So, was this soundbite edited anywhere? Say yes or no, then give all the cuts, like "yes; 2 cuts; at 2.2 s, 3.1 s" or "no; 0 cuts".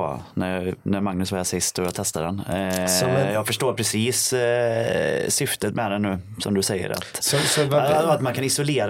no; 0 cuts